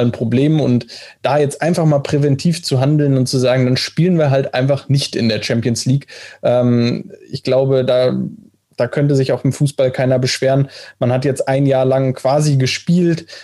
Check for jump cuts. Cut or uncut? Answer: uncut